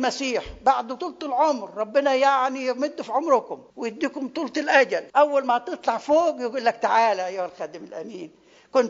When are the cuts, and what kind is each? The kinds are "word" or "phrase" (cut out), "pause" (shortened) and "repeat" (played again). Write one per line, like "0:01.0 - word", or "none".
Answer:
0:03.7 - pause
0:05.1 - pause